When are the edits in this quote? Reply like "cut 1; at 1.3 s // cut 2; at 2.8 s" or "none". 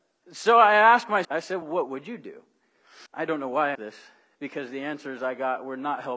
cut 1; at 1.2 s // cut 2; at 1.6 s // cut 3; at 3.1 s // cut 4; at 3.7 s